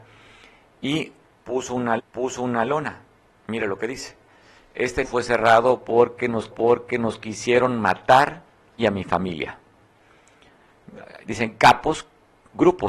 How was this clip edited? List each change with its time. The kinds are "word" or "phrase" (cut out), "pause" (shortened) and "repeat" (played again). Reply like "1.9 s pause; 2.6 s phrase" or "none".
2.0 s repeat; 5.0 s word; 6.5 s repeat; 8.8 s phrase